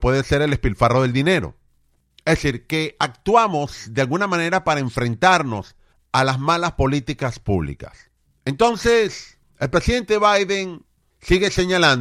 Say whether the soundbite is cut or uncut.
uncut